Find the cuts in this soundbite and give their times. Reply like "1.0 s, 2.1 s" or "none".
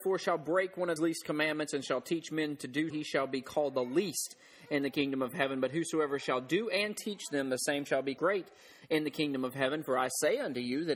1.0 s, 2.9 s, 8.2 s